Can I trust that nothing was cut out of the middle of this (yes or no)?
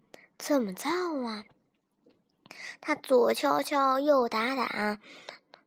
yes